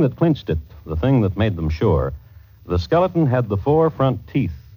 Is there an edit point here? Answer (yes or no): no